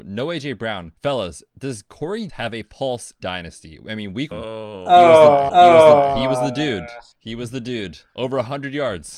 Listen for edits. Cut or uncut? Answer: cut